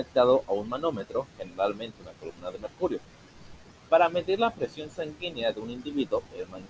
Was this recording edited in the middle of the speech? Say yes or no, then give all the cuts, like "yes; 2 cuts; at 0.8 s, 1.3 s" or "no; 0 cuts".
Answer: no; 0 cuts